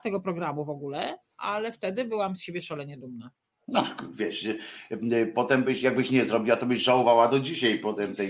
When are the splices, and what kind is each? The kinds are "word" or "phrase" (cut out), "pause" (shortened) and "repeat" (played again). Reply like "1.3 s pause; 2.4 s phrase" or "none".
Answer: none